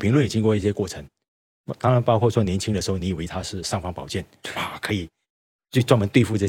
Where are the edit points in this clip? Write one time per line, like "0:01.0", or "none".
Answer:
none

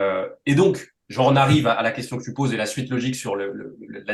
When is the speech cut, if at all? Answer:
0:01.0

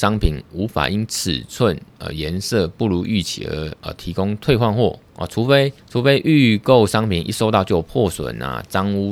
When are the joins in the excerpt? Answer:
0:05.8

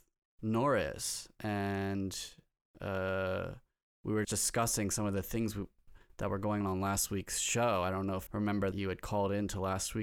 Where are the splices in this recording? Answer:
0:04.2
0:06.6
0:08.3
0:08.7

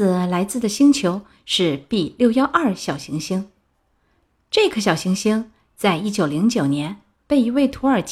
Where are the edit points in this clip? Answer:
none

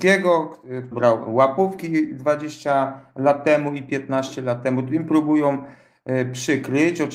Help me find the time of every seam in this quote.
0:00.9

